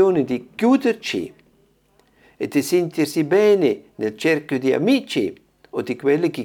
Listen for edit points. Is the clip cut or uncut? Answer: uncut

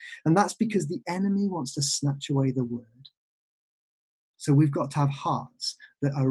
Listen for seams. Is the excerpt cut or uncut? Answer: uncut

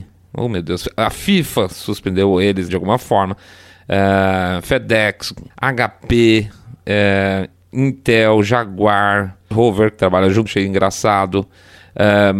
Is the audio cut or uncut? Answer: cut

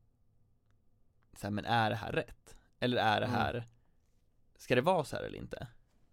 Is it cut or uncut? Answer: uncut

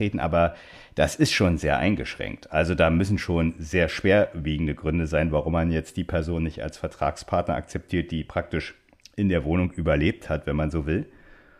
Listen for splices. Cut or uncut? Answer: uncut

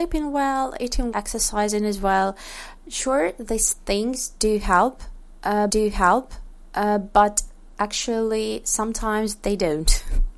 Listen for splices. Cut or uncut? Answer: cut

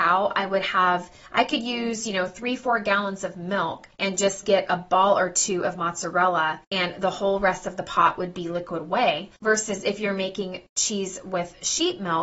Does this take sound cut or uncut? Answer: cut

